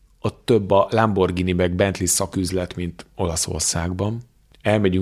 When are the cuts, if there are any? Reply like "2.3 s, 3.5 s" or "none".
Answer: none